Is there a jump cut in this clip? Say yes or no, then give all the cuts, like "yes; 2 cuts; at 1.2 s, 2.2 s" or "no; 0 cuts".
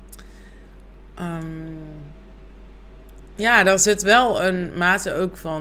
no; 0 cuts